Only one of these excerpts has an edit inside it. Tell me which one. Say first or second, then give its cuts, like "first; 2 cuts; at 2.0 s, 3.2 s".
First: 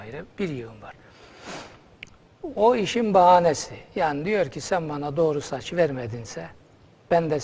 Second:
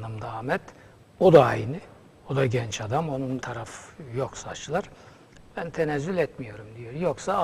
second; 1 cut; at 3.4 s